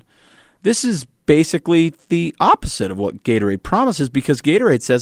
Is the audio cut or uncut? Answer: uncut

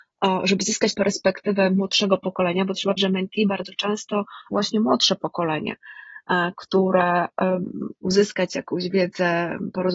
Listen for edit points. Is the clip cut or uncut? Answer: cut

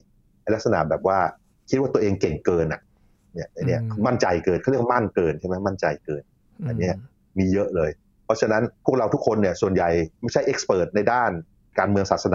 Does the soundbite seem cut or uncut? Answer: cut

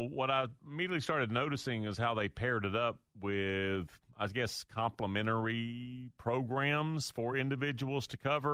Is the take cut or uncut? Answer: uncut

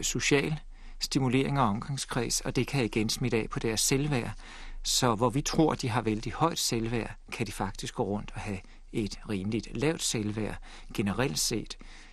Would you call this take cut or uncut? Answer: uncut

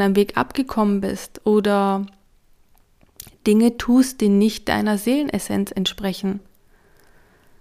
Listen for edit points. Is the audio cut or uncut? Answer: uncut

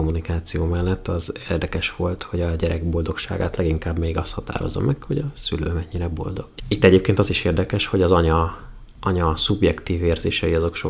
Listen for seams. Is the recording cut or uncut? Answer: uncut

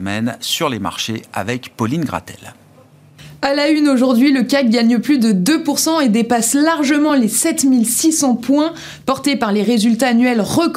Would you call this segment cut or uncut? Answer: uncut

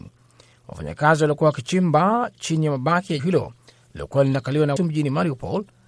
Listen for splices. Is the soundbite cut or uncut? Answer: cut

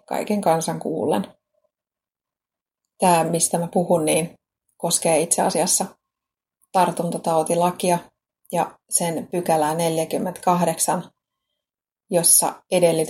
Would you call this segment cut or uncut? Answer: uncut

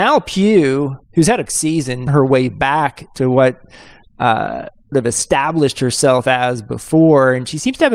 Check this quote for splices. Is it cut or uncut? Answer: cut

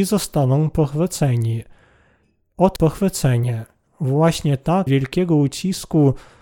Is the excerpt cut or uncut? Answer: cut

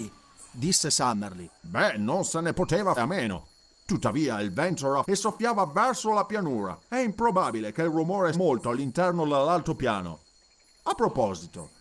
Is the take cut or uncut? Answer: cut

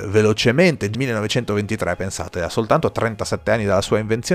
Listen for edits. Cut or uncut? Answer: cut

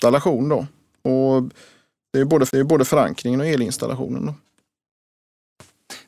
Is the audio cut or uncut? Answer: cut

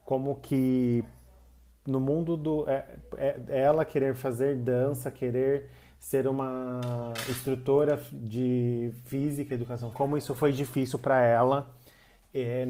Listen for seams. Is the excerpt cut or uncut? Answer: cut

